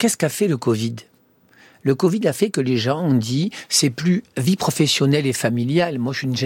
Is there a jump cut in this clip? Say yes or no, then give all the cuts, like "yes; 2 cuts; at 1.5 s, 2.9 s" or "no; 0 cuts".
no; 0 cuts